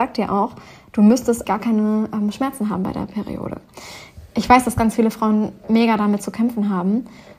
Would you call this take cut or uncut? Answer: cut